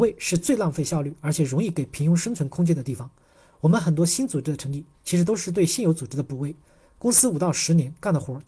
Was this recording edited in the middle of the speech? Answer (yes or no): no